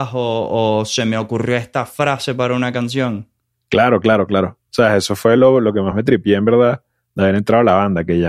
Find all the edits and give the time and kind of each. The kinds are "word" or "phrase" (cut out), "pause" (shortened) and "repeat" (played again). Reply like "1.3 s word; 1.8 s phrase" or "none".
none